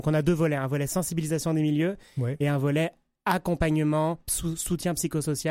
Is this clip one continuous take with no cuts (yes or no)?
yes